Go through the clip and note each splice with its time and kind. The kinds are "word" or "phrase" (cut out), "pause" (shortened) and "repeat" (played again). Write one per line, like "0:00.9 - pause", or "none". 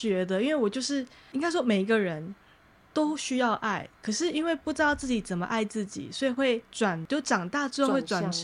none